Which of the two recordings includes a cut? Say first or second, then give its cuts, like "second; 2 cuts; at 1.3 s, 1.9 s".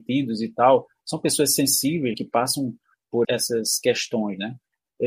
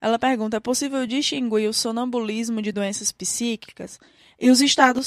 first; 2 cuts; at 2.1 s, 3.2 s